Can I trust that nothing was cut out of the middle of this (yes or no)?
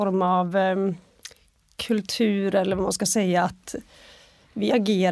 yes